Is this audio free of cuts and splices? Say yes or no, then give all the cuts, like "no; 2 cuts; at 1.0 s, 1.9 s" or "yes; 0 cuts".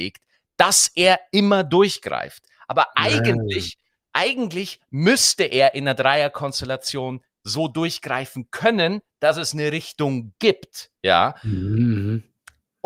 yes; 0 cuts